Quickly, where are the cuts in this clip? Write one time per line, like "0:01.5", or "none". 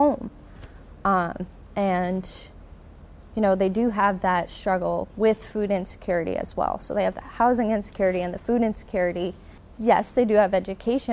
none